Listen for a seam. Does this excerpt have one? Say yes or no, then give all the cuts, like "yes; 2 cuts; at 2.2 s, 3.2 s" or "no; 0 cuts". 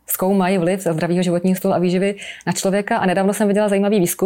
no; 0 cuts